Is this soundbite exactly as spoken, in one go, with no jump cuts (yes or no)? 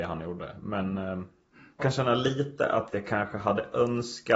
no